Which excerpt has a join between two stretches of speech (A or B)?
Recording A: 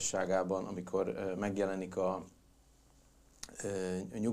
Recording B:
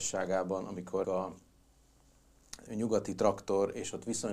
B